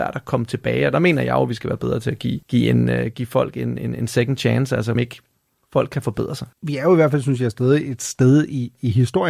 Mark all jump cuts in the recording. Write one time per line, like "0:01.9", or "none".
0:02.4
0:05.0
0:06.5